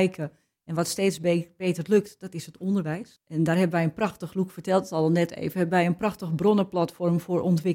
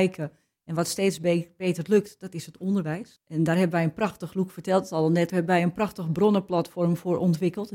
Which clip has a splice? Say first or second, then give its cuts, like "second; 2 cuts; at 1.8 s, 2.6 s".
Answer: second; 1 cut; at 5.3 s